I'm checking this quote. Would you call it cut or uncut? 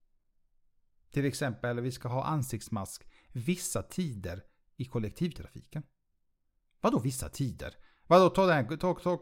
uncut